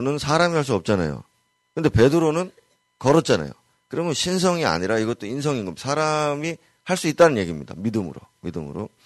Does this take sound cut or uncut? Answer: uncut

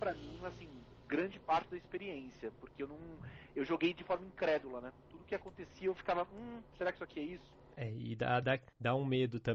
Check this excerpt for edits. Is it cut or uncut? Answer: uncut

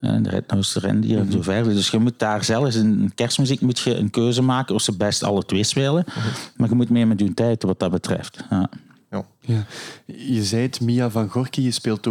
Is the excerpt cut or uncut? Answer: uncut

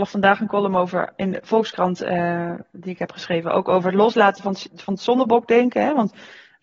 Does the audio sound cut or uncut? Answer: uncut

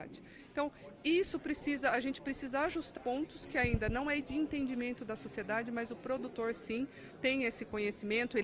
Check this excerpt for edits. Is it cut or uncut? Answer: cut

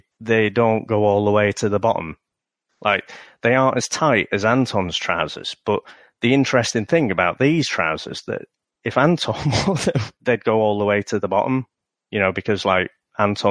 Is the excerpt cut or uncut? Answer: uncut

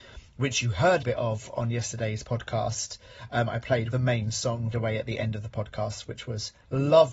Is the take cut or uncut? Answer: cut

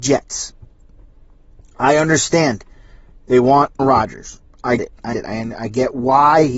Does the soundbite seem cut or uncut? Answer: cut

